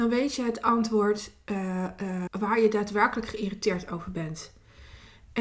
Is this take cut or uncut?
cut